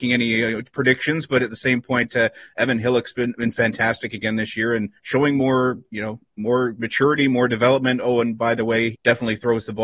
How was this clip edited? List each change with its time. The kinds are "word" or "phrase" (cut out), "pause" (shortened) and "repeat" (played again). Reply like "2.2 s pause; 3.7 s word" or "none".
5.0 s pause; 8.9 s word